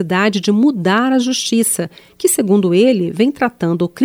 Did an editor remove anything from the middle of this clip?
no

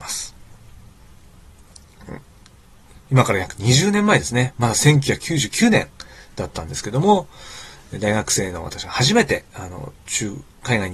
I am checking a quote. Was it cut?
yes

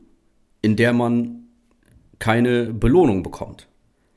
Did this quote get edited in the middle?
no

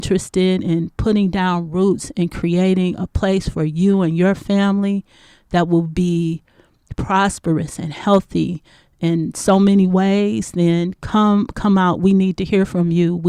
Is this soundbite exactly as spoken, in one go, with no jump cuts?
yes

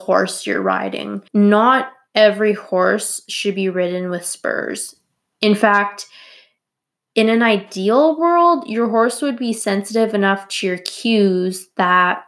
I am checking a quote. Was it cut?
yes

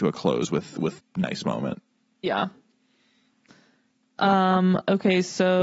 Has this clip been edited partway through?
yes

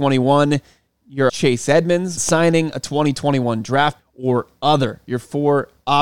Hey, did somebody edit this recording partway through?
yes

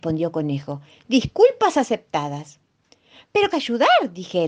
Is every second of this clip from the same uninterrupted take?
no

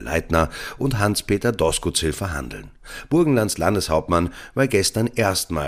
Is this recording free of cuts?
yes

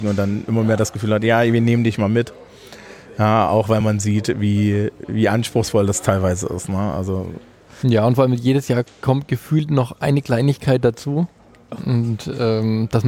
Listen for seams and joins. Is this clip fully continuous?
yes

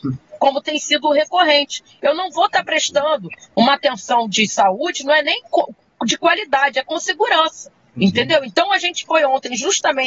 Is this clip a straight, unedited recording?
yes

